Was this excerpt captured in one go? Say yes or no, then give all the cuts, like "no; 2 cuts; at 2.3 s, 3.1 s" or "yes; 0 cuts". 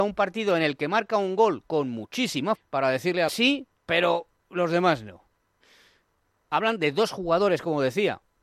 no; 3 cuts; at 2.6 s, 3.3 s, 3.8 s